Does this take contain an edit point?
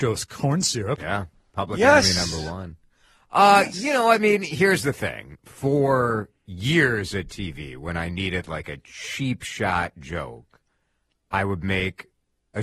no; 0 cuts

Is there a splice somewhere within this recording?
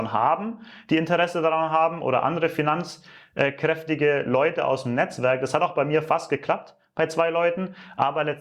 no; 0 cuts

